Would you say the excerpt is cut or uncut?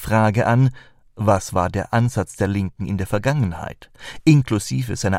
uncut